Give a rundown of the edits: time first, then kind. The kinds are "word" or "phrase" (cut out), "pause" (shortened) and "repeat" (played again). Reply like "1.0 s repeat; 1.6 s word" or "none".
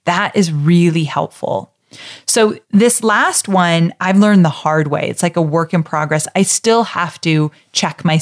2.6 s pause